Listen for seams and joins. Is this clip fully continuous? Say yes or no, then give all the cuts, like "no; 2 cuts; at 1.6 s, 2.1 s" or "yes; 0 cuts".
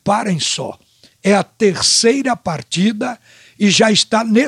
yes; 0 cuts